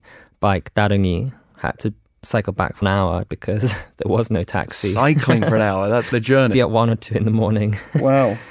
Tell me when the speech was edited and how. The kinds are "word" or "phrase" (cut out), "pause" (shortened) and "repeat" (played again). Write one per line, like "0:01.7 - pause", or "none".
0:02.8 - word
0:03.3 - word
0:06.1 - word
0:06.5 - word